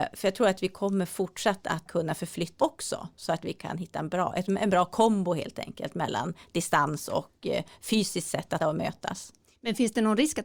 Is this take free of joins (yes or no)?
no